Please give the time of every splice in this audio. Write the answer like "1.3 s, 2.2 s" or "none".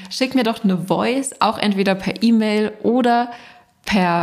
none